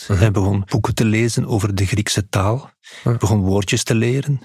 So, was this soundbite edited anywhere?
no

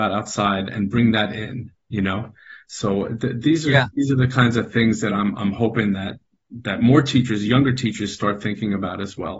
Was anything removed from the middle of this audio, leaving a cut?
no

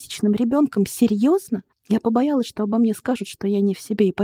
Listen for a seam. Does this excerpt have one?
no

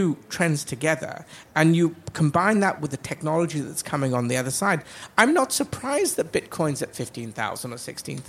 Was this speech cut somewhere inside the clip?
no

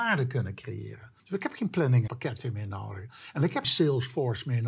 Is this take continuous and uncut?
no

